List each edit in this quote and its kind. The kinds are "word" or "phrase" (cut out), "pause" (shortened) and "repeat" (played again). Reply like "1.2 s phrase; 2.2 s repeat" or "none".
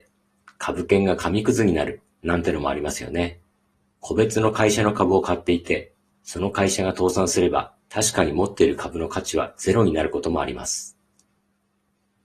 3.7 s pause; 7.8 s pause

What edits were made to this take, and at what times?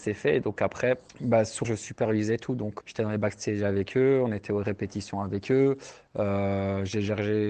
1.1 s pause; 1.6 s word; 2.8 s word

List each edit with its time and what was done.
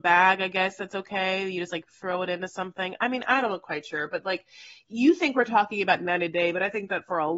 none

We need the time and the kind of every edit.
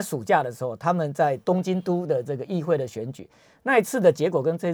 none

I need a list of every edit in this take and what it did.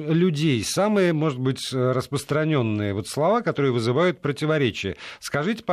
none

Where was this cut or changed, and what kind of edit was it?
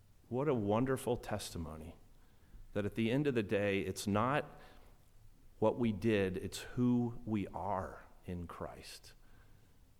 none

